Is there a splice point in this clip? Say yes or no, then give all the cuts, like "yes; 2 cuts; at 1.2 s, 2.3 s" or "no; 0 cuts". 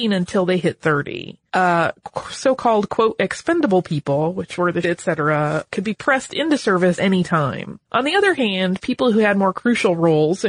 yes; 5 cuts; at 1.5 s, 4.8 s, 5.7 s, 7.0 s, 7.8 s